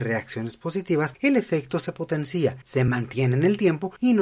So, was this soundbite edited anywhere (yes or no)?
no